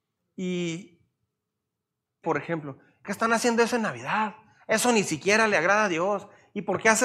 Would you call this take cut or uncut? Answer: cut